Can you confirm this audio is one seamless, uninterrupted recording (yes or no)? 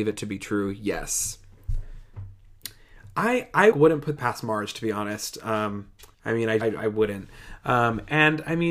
no